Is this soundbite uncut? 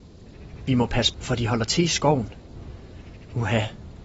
no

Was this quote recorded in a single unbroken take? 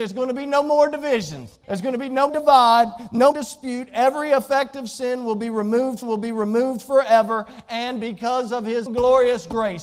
no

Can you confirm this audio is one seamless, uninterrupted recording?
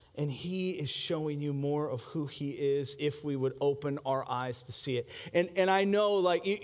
yes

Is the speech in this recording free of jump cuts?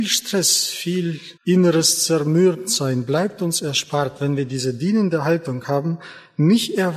no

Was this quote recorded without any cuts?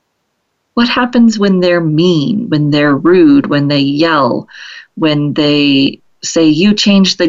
yes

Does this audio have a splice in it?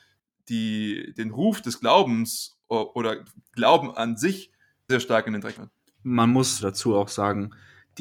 yes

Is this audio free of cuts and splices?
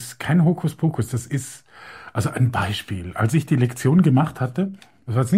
yes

